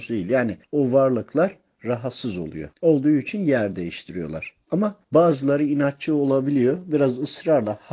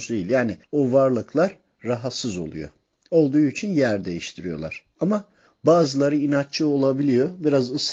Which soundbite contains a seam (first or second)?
first